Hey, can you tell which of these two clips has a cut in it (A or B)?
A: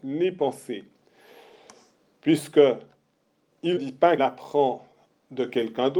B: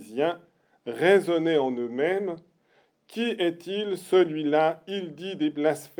A